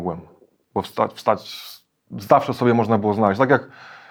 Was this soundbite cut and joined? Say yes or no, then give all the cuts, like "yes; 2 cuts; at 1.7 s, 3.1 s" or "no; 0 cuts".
no; 0 cuts